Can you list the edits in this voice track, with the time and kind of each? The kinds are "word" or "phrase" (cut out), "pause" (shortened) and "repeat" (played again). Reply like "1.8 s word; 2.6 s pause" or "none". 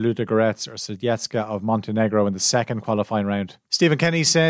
none

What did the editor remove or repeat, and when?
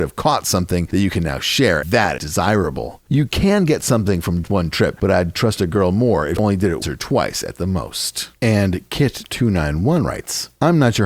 1.8 s word; 2.2 s word; 4.4 s word; 5.0 s word; 6.4 s word; 6.8 s word

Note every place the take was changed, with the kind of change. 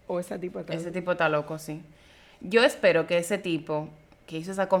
none

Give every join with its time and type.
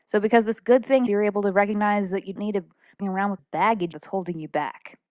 1.1 s word; 2.4 s word; 3.0 s word; 3.4 s word; 3.9 s word

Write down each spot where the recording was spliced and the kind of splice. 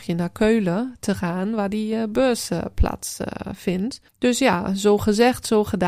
4.1 s pause

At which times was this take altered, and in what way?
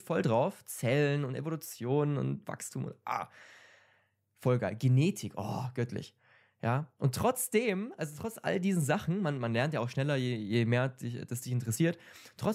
none

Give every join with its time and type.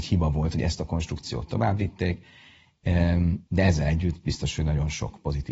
3.5 s pause

